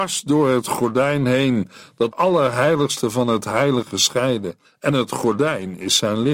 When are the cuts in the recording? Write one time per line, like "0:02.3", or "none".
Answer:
0:02.1
0:04.6